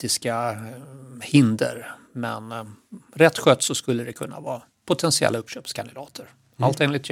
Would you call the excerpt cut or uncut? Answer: uncut